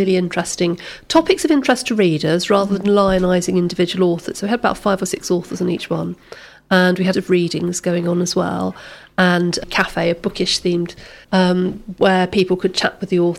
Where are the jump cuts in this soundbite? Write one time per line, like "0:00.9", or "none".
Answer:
0:07.1
0:09.6
0:11.2